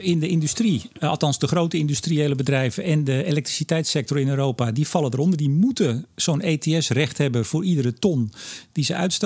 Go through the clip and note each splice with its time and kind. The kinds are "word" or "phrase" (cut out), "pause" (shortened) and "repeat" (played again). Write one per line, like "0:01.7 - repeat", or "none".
none